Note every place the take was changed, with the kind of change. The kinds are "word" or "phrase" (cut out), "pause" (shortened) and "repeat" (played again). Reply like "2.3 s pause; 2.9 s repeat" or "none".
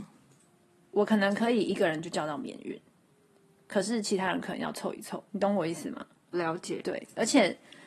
5.3 s pause; 6.3 s word